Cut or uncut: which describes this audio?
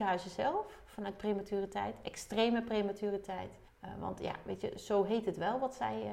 cut